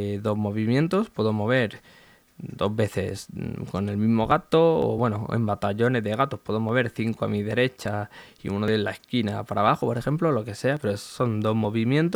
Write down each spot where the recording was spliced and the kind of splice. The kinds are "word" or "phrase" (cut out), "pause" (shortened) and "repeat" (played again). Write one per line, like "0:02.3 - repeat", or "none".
none